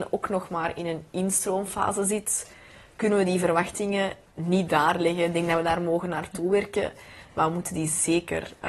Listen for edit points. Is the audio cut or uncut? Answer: uncut